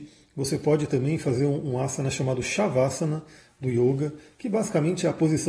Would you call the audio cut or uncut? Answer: uncut